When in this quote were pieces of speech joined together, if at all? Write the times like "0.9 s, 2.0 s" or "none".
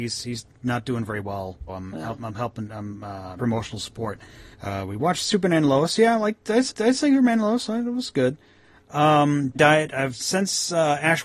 1.7 s, 3.4 s, 4.5 s, 6.7 s, 9.6 s